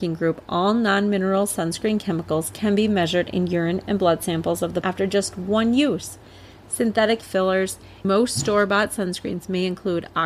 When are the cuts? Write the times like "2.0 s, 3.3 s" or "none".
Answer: 4.8 s, 7.2 s, 8.0 s